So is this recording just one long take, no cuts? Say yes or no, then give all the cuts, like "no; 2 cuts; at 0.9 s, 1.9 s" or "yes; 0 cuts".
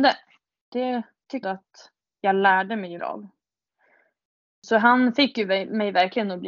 no; 2 cuts; at 1.4 s, 3.0 s